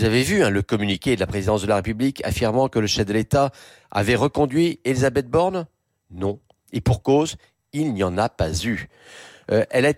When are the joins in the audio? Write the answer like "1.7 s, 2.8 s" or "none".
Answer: none